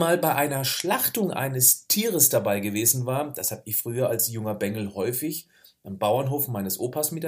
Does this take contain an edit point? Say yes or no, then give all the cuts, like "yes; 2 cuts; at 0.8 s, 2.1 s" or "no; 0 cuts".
no; 0 cuts